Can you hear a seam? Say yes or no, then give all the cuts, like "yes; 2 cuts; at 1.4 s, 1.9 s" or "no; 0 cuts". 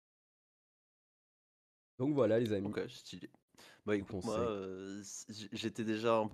no; 0 cuts